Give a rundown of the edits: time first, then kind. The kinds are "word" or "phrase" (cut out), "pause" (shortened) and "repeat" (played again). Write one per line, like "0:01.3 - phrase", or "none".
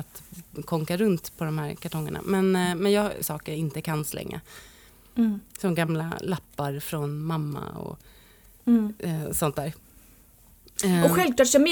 0:03.2 - phrase